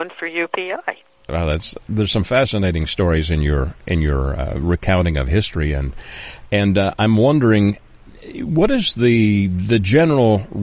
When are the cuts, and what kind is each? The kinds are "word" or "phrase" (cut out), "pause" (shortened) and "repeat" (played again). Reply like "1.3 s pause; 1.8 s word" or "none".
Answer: none